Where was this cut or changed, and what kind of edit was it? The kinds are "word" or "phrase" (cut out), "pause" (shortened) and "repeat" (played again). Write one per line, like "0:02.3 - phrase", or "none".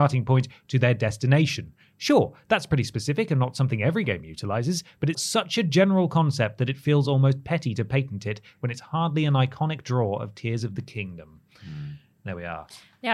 0:05.1 - word

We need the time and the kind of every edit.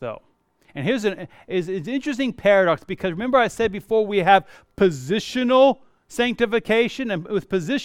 none

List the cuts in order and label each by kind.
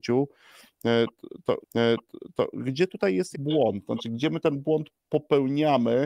0:01.6 - repeat
0:03.3 - word

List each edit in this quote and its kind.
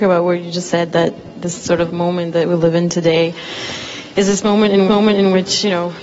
0:01.9 - word
0:04.9 - repeat

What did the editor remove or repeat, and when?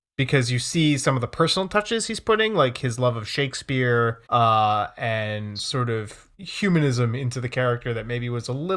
0:04.3 - pause

